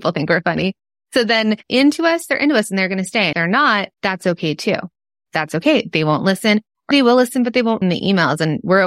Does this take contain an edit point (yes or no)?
yes